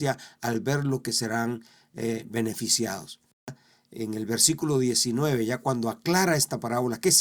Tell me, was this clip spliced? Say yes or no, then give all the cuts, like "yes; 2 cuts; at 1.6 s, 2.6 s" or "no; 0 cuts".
no; 0 cuts